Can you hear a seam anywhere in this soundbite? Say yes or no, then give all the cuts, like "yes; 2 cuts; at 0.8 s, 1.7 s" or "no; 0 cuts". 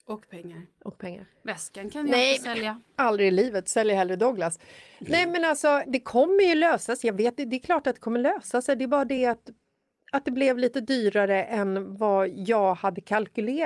no; 0 cuts